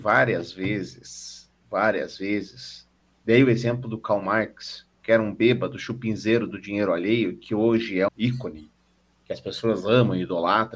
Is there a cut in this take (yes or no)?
yes